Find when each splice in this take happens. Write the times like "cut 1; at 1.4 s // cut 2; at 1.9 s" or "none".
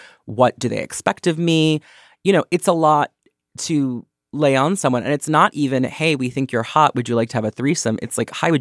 none